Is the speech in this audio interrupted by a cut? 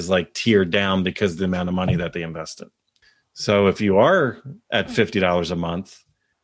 no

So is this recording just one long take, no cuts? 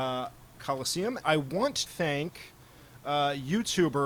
no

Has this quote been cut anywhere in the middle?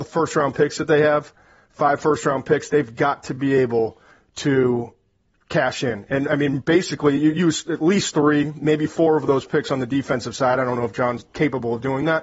no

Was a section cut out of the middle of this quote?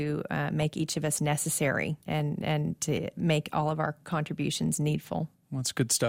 yes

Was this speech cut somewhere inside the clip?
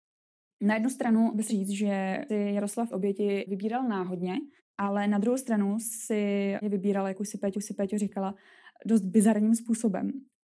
yes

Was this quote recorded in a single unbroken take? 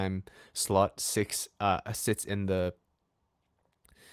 yes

